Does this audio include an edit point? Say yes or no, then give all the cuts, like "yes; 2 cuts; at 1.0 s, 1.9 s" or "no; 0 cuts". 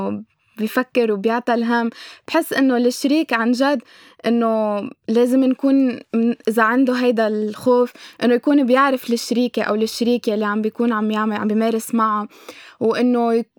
no; 0 cuts